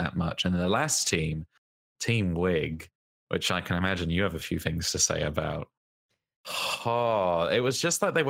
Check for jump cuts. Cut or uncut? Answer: uncut